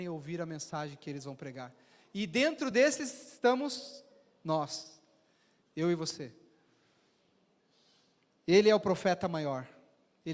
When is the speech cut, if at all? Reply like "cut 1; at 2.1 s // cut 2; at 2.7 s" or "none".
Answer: none